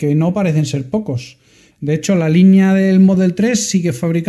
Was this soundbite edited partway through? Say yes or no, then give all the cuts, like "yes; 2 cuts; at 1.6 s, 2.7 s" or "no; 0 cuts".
no; 0 cuts